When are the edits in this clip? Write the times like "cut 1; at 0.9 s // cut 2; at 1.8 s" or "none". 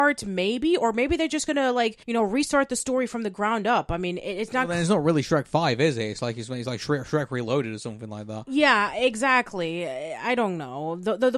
cut 1; at 2.0 s

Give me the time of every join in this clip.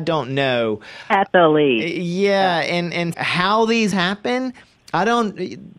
cut 1; at 3.1 s // cut 2; at 3.9 s

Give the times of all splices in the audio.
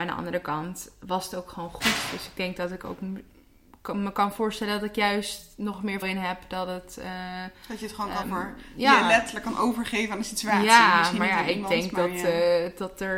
cut 1; at 6.0 s // cut 2; at 8.2 s

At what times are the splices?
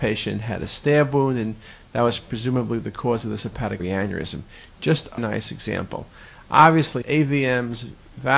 cut 1; at 3.8 s // cut 2; at 5.2 s // cut 3; at 7.0 s

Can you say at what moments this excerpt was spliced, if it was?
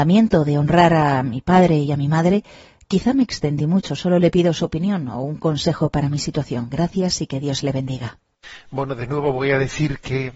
none

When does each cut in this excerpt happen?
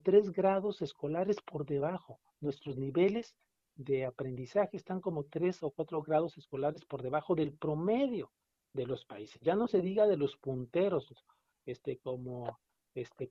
none

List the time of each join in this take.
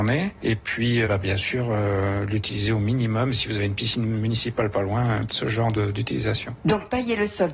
cut 1; at 1.0 s // cut 2; at 5.3 s

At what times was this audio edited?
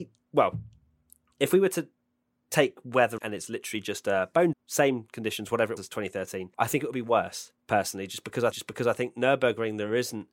cut 1; at 3.2 s // cut 2; at 4.5 s // cut 3; at 5.8 s // cut 4; at 6.5 s // cut 5; at 7.6 s // cut 6; at 8.5 s

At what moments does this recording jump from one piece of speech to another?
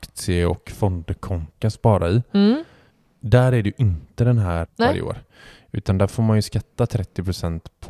cut 1; at 1.6 s // cut 2; at 4.7 s

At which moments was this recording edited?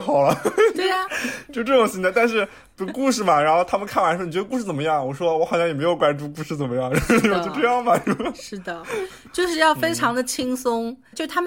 none

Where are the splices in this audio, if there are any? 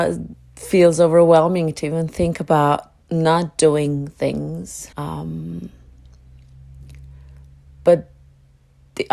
cut 1; at 3.0 s // cut 2; at 4.9 s

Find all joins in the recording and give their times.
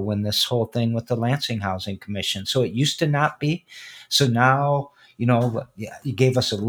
none

